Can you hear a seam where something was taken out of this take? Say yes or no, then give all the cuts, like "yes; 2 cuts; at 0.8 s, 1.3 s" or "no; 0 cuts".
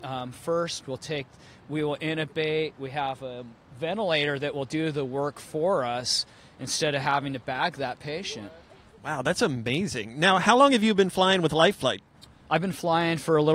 no; 0 cuts